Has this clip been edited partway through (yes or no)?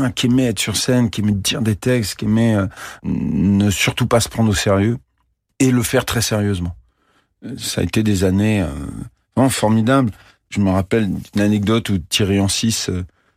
no